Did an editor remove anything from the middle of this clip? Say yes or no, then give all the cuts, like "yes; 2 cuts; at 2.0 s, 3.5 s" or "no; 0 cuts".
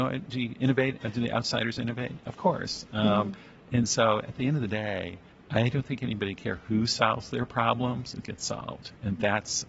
yes; 2 cuts; at 5.3 s, 8.2 s